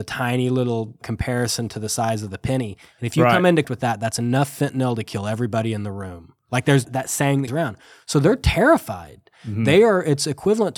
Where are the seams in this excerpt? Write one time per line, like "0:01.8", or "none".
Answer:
0:01.0
0:03.6
0:06.8
0:07.5